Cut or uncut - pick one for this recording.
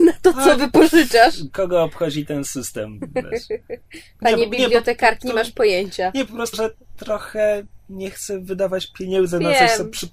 cut